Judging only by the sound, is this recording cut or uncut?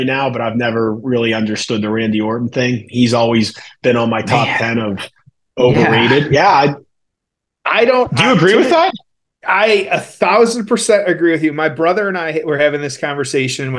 uncut